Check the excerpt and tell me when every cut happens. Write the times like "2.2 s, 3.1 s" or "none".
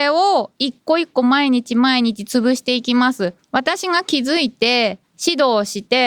3.4 s, 5.1 s